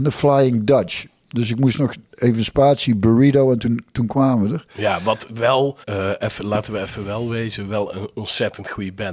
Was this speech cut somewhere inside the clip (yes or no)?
yes